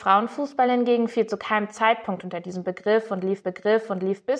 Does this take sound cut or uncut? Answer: cut